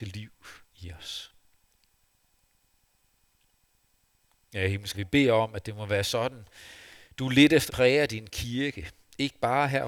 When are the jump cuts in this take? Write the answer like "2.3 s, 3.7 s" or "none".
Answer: 4.9 s, 7.7 s